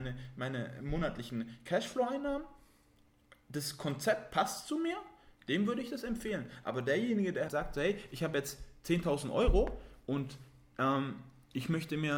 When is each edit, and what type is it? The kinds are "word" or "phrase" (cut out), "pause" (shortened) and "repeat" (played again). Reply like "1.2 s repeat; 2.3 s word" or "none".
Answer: 7.5 s word